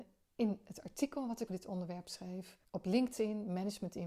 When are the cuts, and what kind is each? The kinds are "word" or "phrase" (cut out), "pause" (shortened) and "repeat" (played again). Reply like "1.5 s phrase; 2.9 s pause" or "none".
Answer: 1.5 s word; 2.6 s pause

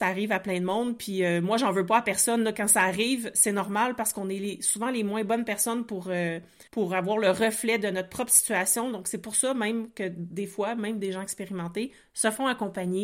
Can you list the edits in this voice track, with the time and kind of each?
6.7 s pause

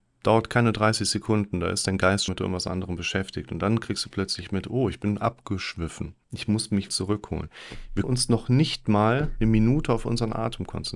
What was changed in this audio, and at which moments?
2.3 s word; 6.2 s pause; 6.9 s word; 8.0 s word

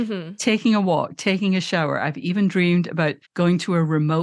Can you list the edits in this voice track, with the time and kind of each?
3.2 s pause

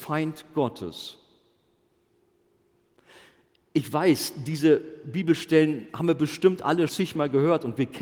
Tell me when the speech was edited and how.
6.9 s word

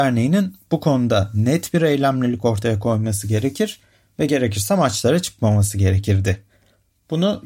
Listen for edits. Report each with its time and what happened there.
none

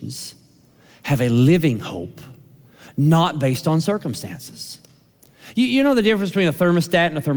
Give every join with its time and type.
none

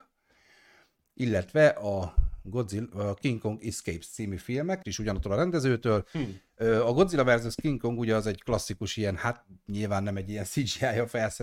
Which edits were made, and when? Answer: 4.8 s word

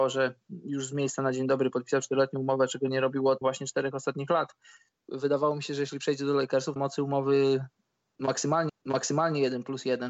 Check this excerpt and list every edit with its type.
3.4 s word; 6.8 s phrase; 8.7 s repeat

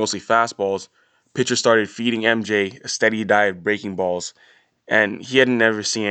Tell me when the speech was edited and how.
none

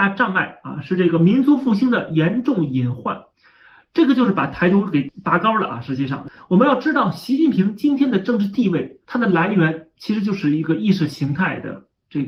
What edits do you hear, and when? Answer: 3.3 s pause; 9.0 s pause

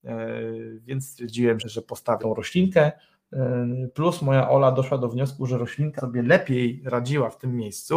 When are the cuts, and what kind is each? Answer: 1.6 s word; 2.2 s word; 6.0 s word

